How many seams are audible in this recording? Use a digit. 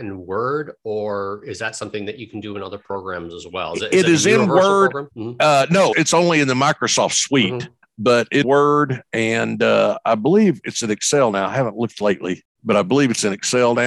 4